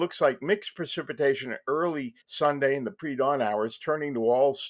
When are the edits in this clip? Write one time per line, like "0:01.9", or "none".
0:02.2